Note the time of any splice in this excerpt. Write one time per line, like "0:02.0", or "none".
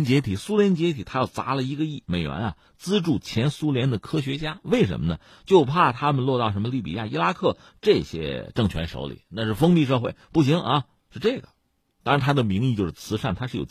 none